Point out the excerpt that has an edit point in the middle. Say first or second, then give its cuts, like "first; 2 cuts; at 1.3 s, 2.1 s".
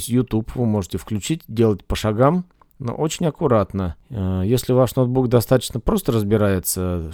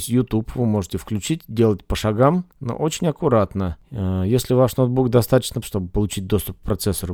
second; 2 cuts; at 2.5 s, 5.6 s